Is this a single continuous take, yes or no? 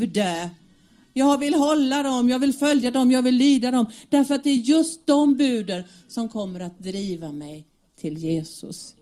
yes